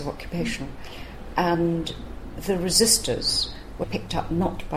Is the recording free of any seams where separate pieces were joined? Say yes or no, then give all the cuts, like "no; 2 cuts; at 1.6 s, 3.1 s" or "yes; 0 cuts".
no; 1 cut; at 3.8 s